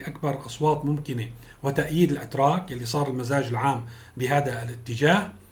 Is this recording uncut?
yes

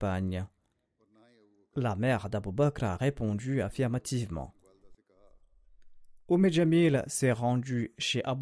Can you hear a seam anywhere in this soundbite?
no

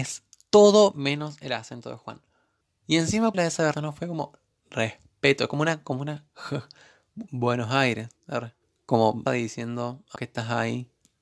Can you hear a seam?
yes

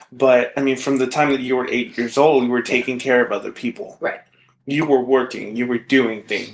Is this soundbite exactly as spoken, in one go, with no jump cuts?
yes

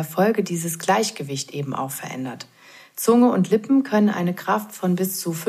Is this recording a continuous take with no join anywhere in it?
yes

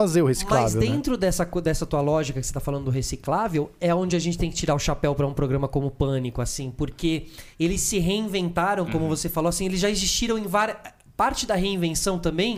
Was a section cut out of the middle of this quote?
yes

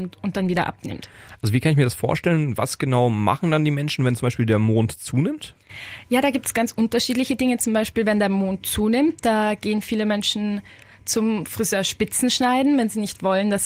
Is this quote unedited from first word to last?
yes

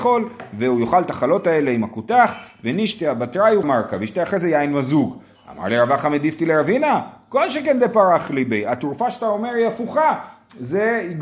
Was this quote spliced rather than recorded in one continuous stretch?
yes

